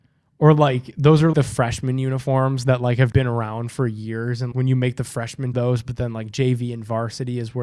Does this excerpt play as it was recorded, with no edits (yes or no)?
no